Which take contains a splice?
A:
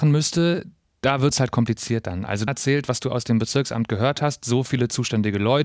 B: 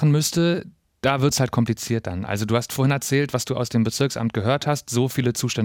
A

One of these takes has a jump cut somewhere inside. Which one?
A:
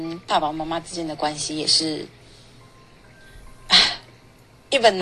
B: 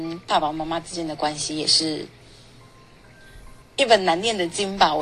B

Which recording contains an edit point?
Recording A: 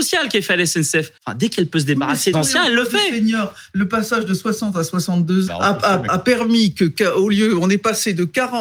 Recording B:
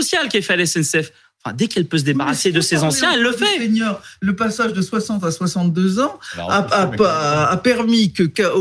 A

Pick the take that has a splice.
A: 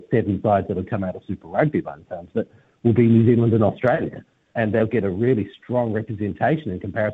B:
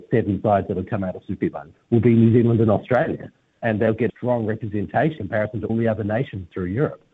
B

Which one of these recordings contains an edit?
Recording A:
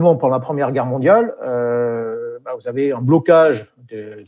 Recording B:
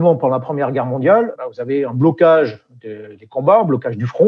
B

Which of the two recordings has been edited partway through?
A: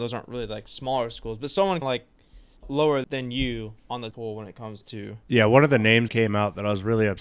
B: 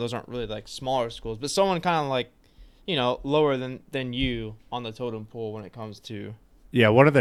A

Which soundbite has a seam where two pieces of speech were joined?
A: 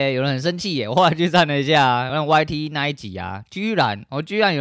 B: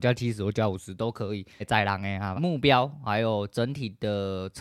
B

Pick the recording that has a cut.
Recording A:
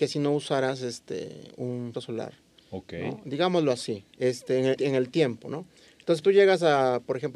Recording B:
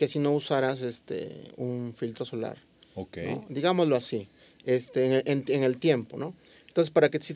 A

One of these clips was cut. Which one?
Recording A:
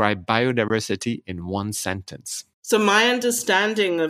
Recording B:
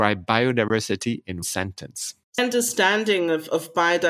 B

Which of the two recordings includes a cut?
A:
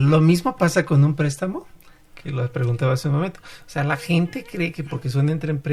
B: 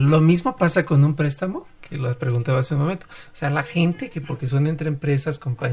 B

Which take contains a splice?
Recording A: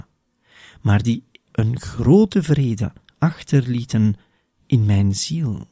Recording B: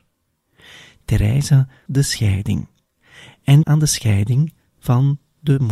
B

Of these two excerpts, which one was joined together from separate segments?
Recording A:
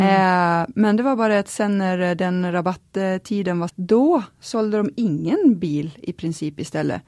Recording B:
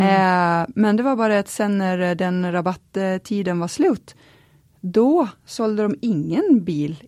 A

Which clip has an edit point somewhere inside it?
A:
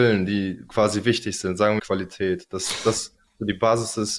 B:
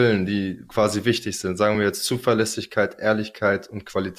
A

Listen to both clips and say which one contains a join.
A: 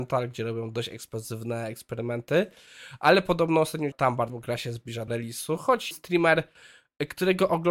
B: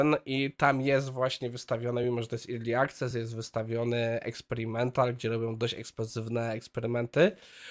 A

